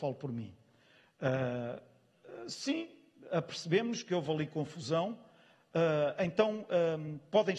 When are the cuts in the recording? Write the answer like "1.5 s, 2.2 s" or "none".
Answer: none